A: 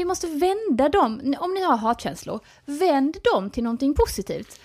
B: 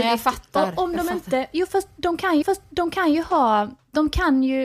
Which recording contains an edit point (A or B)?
B